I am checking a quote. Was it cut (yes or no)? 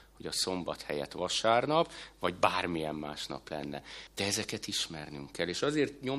yes